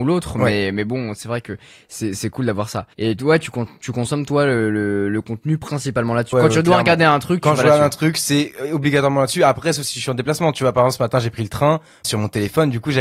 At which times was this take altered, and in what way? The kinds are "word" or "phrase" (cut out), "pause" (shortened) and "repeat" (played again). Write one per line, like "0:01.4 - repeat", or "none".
0:02.9 - pause
0:06.3 - word
0:12.0 - word